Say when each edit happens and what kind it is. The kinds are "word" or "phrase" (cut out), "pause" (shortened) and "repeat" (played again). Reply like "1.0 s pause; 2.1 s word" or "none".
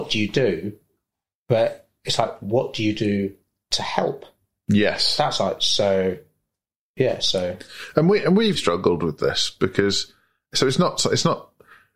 8.5 s word